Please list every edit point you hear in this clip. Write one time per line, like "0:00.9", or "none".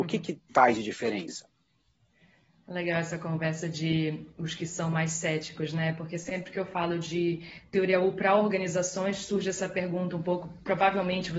none